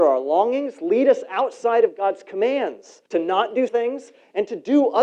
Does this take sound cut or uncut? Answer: cut